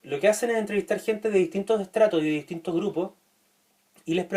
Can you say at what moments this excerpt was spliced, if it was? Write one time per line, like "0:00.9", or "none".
none